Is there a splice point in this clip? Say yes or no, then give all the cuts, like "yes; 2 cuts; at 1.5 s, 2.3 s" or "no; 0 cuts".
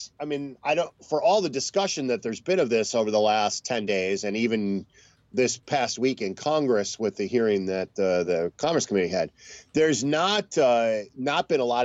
no; 0 cuts